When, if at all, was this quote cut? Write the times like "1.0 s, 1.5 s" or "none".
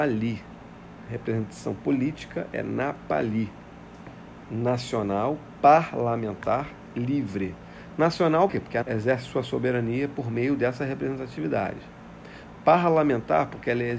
8.5 s, 8.8 s